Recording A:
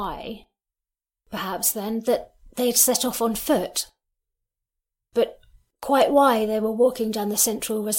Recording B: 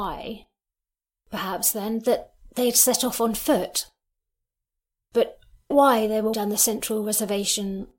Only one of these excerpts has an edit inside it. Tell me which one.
B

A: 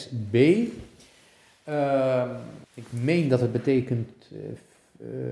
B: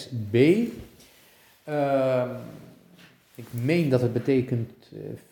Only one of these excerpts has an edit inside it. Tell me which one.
A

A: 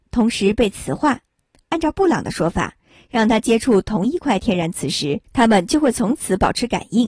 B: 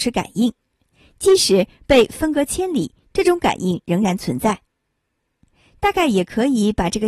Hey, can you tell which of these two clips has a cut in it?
A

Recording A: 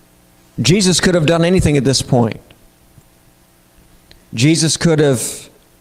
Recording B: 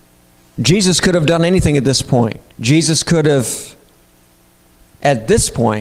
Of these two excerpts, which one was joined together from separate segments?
B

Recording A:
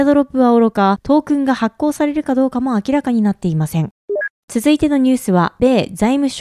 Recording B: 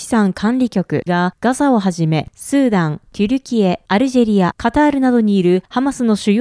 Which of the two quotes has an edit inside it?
B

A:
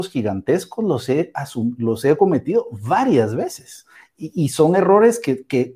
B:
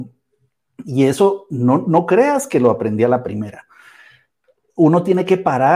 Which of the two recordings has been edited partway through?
A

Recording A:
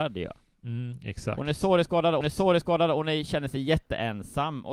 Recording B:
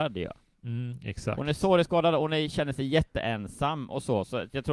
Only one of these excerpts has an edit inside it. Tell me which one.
A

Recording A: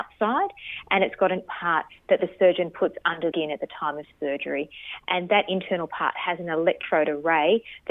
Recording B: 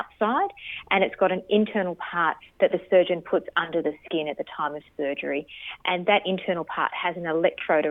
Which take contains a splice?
A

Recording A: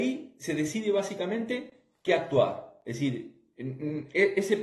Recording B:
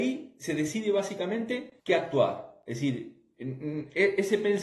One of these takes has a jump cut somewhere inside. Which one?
B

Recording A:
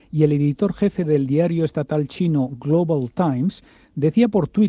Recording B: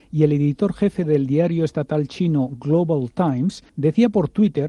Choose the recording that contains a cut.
B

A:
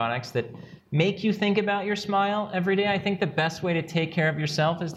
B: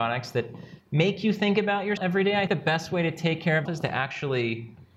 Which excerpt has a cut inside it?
B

